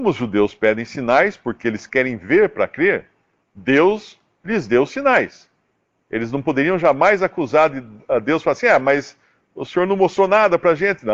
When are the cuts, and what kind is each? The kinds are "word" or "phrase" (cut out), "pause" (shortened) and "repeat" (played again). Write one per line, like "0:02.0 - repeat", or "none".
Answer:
none